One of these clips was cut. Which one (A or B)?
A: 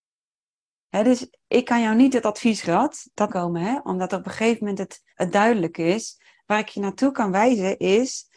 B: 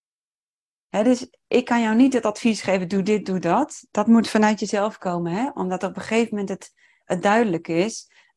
A